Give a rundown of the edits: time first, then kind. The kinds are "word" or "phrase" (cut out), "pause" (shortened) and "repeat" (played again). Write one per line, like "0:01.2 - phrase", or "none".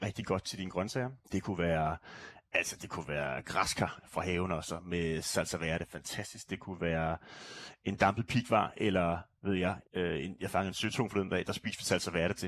0:01.2 - pause
0:09.9 - pause